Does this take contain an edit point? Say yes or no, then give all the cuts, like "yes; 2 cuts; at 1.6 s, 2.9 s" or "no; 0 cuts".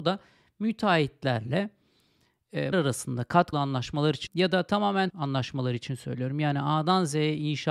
yes; 4 cuts; at 2.7 s, 3.5 s, 4.3 s, 5.1 s